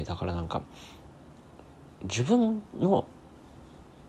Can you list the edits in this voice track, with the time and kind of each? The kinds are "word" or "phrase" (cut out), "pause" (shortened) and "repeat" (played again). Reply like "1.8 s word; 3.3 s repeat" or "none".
none